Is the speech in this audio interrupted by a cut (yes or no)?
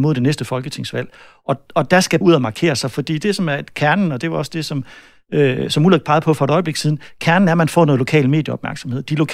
yes